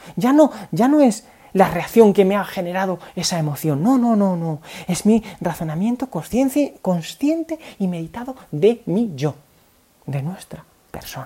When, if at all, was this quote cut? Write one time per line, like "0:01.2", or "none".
none